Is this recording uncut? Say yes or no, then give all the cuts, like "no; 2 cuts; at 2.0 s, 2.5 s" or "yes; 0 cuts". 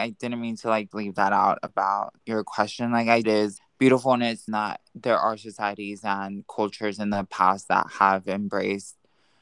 no; 6 cuts; at 0.9 s, 2.2 s, 3.2 s, 3.6 s, 4.5 s, 4.9 s